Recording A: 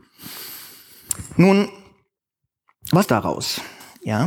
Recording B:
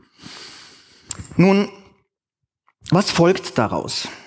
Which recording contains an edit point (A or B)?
A